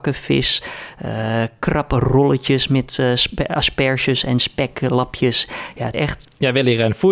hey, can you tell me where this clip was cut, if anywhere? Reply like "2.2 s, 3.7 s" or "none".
5.9 s